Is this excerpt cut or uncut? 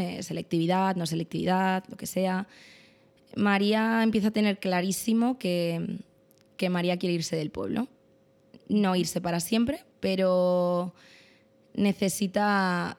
cut